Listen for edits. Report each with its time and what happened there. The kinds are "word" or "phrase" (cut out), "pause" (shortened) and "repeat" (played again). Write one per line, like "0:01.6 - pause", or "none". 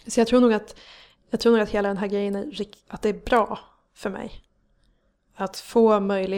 none